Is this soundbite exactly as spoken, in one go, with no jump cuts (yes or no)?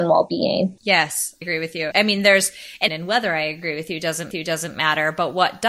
no